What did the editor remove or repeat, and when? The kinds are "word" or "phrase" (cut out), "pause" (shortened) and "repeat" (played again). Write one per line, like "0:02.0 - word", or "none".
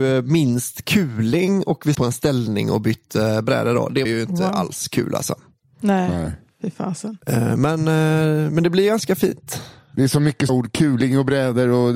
0:01.9 - word
0:04.0 - word
0:10.5 - word